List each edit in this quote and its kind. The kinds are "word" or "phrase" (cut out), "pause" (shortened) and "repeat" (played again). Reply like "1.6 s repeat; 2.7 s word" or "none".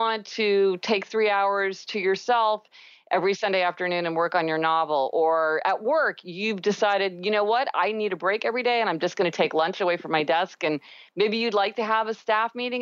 none